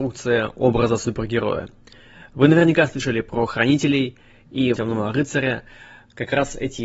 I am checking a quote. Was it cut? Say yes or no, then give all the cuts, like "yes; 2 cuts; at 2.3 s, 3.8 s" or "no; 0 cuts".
yes; 1 cut; at 4.8 s